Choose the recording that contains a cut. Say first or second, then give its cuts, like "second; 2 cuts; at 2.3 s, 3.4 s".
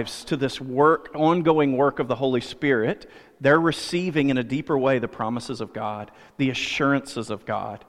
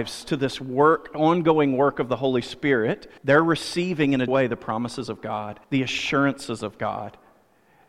second; 3 cuts; at 3.2 s, 4.3 s, 5.6 s